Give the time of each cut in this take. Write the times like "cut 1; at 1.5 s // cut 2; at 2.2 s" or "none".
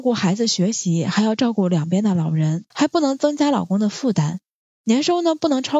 cut 1; at 2.7 s